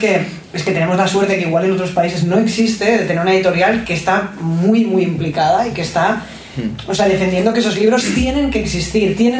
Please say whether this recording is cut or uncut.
uncut